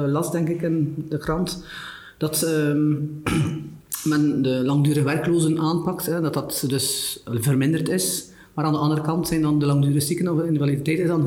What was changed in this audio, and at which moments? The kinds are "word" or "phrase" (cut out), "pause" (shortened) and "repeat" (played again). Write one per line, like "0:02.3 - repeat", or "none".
none